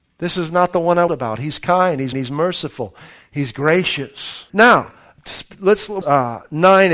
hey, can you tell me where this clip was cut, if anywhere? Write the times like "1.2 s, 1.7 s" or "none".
1.1 s, 2.1 s, 4.5 s, 6.0 s